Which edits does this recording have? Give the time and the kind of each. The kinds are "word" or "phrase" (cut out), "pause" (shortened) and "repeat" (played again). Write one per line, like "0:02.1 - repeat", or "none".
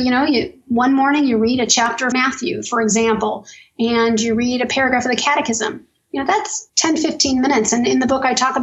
0:02.1 - word
0:06.7 - word